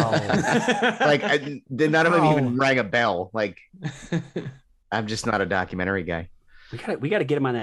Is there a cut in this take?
no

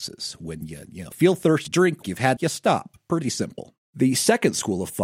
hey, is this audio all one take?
no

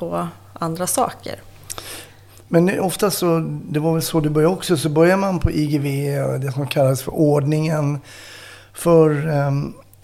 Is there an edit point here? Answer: no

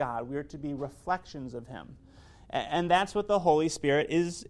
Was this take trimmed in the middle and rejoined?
no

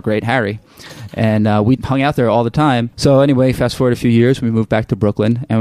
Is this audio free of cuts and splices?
no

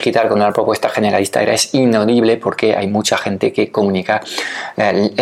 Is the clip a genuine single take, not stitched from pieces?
yes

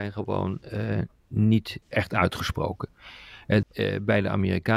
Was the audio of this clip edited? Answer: yes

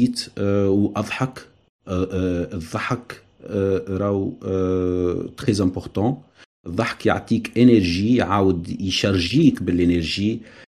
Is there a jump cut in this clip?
no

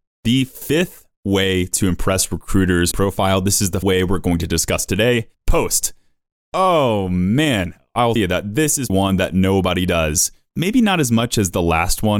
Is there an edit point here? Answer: yes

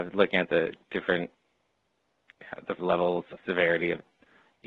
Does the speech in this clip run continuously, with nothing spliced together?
no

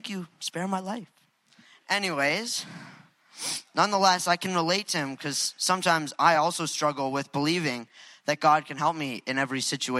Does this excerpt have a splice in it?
no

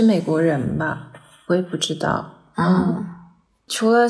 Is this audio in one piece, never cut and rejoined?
yes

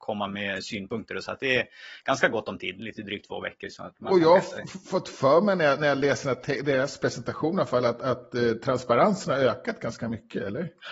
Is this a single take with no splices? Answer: yes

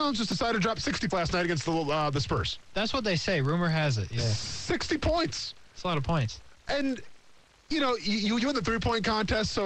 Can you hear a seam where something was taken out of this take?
yes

